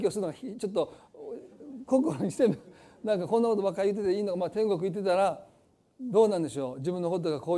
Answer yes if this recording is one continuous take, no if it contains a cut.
yes